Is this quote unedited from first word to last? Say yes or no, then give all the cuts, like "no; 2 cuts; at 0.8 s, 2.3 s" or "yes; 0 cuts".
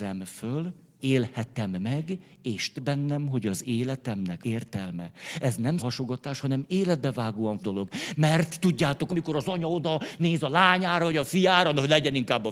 no; 6 cuts; at 1.0 s, 2.7 s, 4.4 s, 5.8 s, 7.6 s, 9.1 s